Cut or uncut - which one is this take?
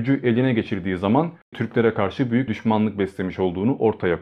cut